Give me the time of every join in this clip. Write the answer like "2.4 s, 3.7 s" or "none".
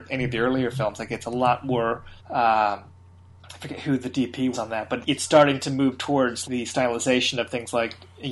2.2 s, 4.5 s, 5.0 s, 6.4 s